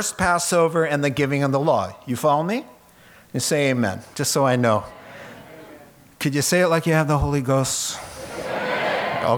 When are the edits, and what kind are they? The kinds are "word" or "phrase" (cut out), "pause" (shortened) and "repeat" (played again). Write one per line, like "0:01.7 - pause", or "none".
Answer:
none